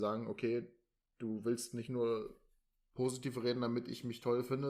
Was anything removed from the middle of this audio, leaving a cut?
no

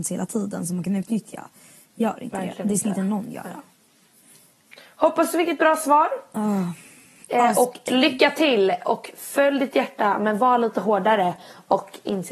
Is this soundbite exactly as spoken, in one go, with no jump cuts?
yes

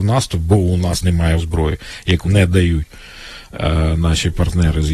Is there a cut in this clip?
yes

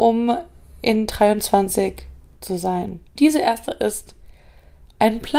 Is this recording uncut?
no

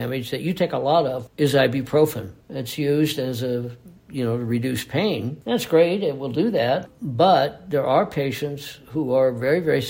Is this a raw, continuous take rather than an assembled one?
no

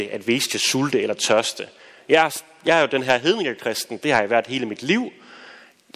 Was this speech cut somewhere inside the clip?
no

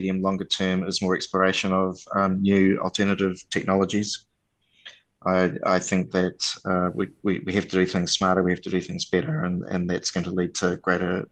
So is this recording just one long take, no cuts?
yes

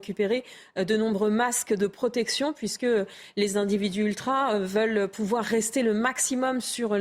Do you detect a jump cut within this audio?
no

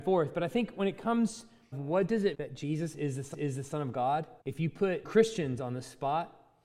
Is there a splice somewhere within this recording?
yes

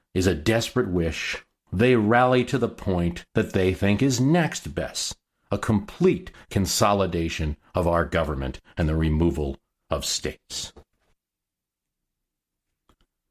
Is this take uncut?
no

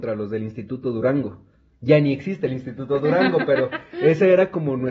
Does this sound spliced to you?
no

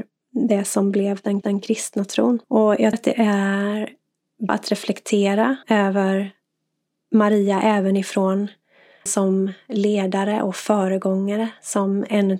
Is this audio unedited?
no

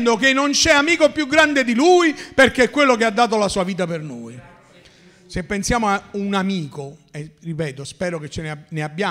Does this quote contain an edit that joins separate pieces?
no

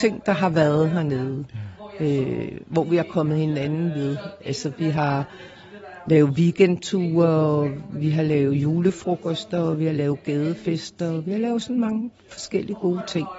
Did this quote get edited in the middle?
no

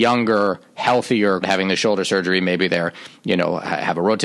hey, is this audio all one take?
no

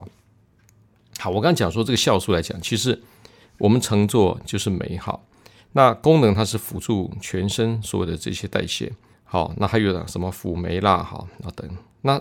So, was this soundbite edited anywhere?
yes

